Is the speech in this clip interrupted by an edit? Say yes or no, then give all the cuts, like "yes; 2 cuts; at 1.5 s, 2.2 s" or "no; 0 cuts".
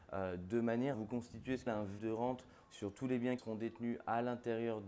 yes; 4 cuts; at 0.9 s, 1.7 s, 2.0 s, 3.4 s